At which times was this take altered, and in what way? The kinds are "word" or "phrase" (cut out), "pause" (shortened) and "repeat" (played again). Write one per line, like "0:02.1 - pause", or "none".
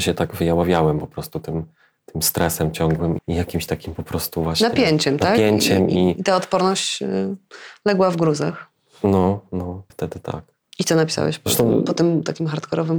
0:03.2 - word
0:09.9 - word